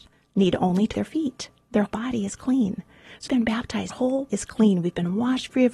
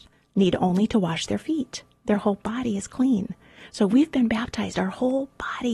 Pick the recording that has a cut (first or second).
first